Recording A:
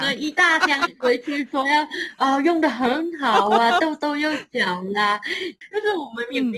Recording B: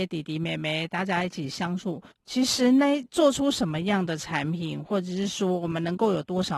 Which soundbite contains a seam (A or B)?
B